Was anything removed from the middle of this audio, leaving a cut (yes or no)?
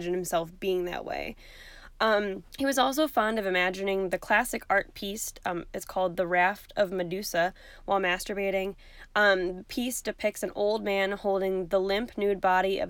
yes